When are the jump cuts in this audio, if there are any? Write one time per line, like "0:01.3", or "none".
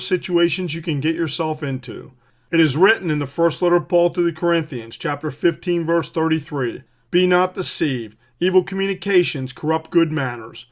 none